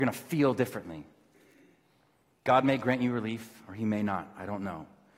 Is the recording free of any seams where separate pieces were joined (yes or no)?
yes